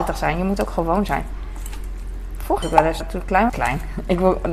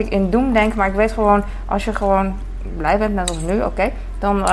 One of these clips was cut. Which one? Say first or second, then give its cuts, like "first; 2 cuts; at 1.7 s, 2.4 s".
first; 3 cuts; at 2.6 s, 3.0 s, 3.5 s